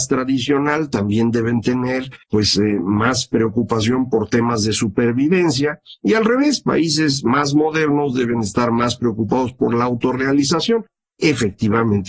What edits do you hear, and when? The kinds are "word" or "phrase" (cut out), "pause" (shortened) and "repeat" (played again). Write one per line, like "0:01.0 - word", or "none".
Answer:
0:02.2 - pause